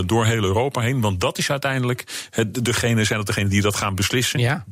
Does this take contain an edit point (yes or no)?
no